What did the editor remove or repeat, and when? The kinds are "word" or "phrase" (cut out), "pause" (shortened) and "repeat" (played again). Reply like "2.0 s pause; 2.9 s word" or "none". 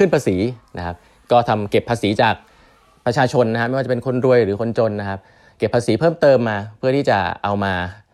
none